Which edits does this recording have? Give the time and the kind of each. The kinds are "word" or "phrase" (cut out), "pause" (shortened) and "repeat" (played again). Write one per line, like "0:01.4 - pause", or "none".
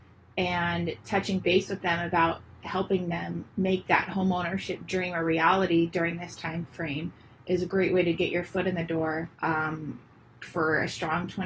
0:03.5 - pause
0:09.3 - pause